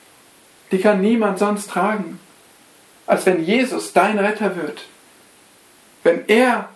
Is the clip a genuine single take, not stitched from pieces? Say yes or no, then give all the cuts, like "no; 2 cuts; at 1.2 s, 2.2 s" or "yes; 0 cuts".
yes; 0 cuts